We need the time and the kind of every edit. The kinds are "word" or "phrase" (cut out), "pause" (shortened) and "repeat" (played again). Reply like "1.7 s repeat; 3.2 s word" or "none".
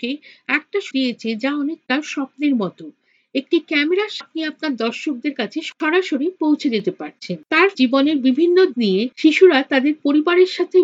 0.9 s word; 4.2 s word; 7.7 s word; 8.7 s word